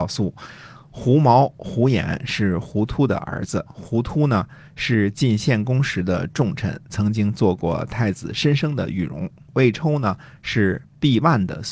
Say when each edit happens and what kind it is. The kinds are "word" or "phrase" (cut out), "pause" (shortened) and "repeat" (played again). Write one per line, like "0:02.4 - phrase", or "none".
0:03.7 - pause